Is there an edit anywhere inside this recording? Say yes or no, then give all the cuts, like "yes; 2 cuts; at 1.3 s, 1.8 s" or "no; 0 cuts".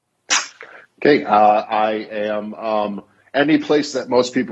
no; 0 cuts